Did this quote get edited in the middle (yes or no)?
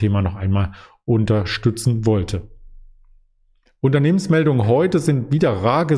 no